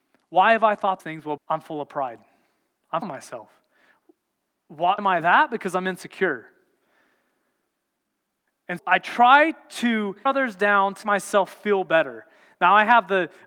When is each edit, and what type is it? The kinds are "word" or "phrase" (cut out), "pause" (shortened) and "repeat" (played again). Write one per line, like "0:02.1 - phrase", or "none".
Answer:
0:01.0 - word
0:01.4 - word
0:03.0 - word
0:05.0 - word
0:08.8 - word
0:10.3 - word
0:11.0 - word

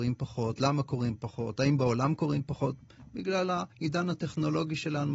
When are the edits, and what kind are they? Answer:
0:03.7 - pause

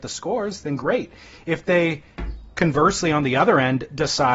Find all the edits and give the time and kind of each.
none

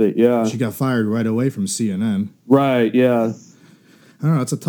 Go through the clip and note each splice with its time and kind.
0:02.4 - pause

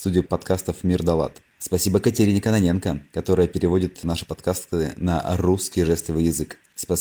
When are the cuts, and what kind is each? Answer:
none

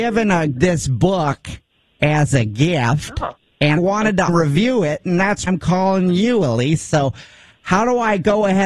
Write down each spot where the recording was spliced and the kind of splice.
0:03.8 - word
0:04.3 - word
0:05.5 - word

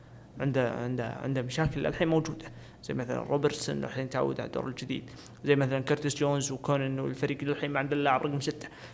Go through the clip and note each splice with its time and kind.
none

